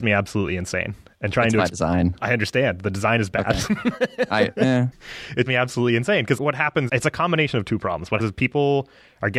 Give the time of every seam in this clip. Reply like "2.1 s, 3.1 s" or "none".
2.2 s, 4.9 s, 5.5 s, 6.4 s, 6.9 s, 8.2 s